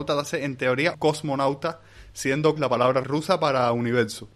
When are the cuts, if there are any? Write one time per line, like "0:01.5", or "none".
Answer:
0:00.9
0:02.6
0:03.0